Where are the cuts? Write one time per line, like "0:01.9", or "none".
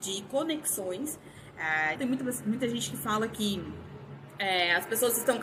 0:02.0